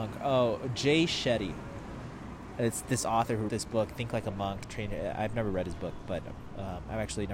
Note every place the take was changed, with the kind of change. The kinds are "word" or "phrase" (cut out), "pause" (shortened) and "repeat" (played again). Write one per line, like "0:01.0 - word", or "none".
0:03.5 - word